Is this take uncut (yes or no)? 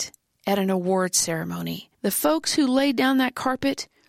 no